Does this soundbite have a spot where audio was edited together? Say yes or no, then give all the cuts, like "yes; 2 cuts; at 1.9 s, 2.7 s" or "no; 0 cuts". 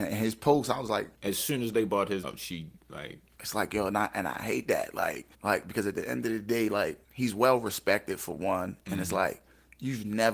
yes; 5 cuts; at 1.1 s, 2.2 s, 2.8 s, 5.3 s, 7.0 s